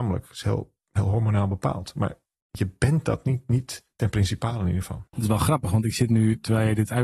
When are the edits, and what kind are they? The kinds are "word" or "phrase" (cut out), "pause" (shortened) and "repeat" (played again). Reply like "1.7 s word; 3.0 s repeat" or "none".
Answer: 5.1 s pause